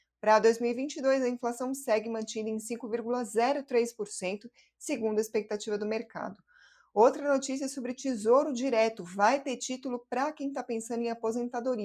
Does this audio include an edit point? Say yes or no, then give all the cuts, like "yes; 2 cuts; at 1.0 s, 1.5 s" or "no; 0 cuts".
no; 0 cuts